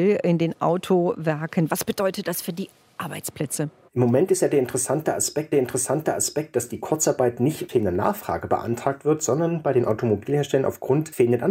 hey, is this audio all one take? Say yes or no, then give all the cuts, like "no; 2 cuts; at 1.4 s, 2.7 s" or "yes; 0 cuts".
no; 2 cuts; at 5.5 s, 7.7 s